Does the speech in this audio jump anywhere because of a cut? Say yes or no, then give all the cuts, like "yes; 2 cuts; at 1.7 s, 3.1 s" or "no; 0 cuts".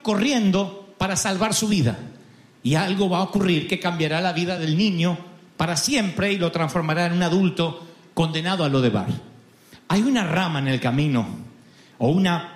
no; 0 cuts